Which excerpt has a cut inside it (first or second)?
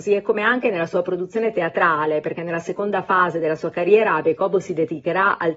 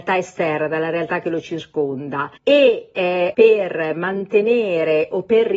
second